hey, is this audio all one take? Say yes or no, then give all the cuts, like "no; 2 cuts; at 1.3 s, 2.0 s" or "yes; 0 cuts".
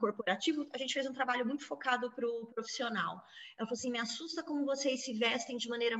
yes; 0 cuts